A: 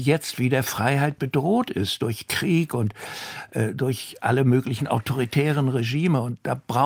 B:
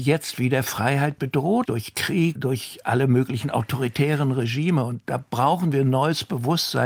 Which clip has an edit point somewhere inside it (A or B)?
B